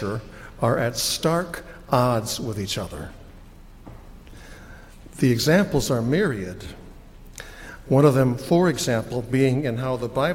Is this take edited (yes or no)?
no